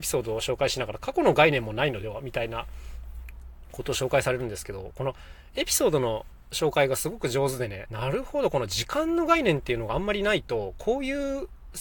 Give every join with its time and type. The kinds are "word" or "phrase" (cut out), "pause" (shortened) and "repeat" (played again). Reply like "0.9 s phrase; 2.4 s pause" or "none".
7.9 s word